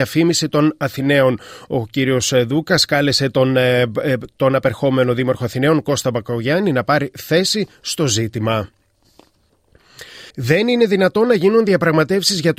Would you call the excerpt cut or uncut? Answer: cut